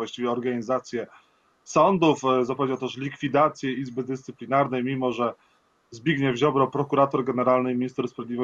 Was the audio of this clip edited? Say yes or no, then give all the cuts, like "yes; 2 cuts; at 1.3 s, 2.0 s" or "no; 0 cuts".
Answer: no; 0 cuts